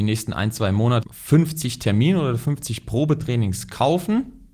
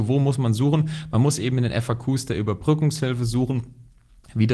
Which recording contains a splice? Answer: first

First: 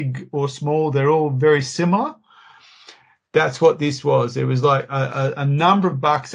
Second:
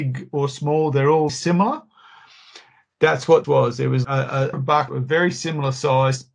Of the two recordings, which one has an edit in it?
second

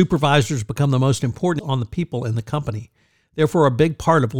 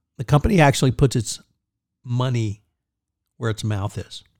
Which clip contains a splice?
first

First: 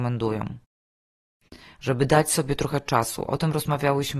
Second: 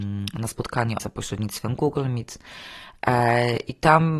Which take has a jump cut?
second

